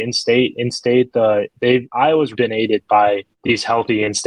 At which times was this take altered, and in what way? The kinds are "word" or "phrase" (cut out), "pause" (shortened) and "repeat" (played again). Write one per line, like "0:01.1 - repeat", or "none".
0:02.3 - word